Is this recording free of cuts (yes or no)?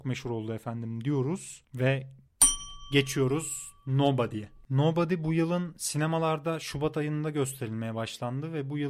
yes